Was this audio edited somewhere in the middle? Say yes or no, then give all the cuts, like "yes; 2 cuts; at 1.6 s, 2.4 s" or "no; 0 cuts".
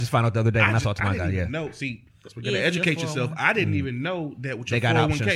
no; 0 cuts